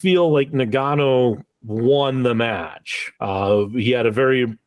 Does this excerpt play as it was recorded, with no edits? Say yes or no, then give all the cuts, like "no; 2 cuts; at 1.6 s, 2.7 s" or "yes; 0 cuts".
no; 2 cuts; at 1.5 s, 3.1 s